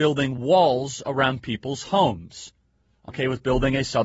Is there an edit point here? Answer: yes; 1 cut; at 3.1 s

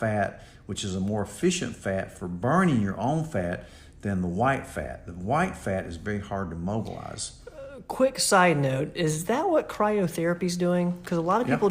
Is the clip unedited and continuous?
yes; 0 cuts

